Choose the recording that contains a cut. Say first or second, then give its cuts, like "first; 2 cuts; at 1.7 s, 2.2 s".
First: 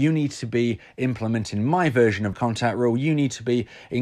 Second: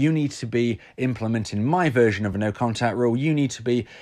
first; 1 cut; at 2.3 s